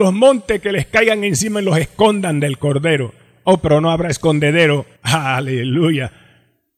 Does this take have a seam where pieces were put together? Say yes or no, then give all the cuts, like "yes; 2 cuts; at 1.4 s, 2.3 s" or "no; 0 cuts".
yes; 1 cut; at 5.0 s